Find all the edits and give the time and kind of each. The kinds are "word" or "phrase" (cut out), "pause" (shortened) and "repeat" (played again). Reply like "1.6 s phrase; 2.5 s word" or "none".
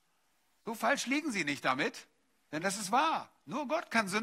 none